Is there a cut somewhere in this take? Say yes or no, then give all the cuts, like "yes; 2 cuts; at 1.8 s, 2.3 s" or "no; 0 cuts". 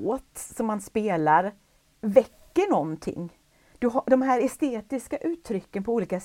no; 0 cuts